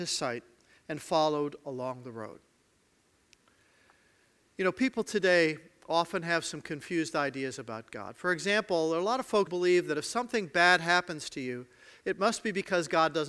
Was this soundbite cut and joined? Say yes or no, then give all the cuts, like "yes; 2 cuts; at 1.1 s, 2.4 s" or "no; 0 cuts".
yes; 1 cut; at 9.5 s